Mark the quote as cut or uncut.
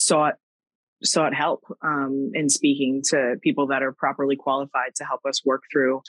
uncut